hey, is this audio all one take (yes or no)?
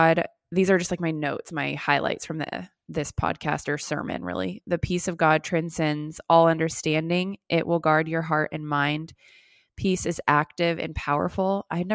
yes